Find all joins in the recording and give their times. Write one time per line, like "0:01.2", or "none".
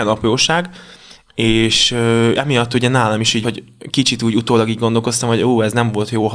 0:02.4
0:03.4